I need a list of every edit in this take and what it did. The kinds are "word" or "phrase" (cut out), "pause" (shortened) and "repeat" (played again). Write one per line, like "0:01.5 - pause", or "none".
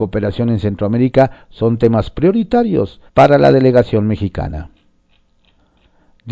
0:03.1 - pause